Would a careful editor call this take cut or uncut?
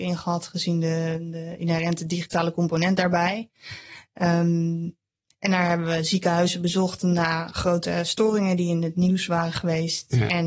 uncut